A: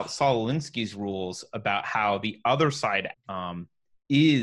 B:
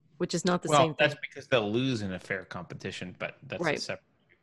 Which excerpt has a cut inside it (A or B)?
A